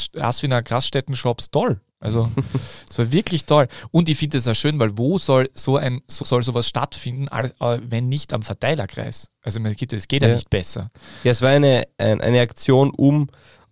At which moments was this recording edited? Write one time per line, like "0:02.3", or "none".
0:01.9
0:06.2